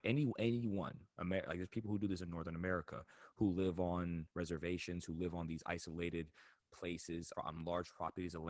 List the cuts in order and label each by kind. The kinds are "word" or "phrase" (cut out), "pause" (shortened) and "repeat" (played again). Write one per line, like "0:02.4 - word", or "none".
0:04.3 - pause
0:06.6 - word
0:07.3 - word